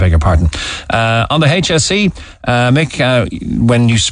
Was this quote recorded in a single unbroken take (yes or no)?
yes